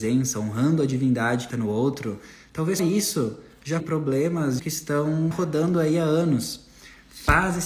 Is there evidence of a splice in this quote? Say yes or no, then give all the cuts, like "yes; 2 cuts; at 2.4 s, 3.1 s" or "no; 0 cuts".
yes; 5 cuts; at 1.5 s, 2.8 s, 3.8 s, 4.6 s, 5.3 s